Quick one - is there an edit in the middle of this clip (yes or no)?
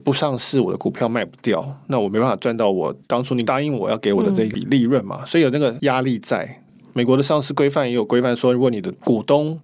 no